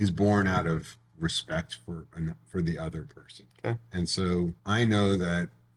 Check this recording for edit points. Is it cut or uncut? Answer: cut